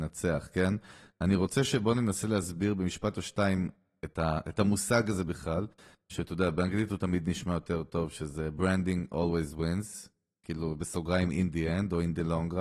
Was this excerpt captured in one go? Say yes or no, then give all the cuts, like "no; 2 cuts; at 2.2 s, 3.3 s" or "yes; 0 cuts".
yes; 0 cuts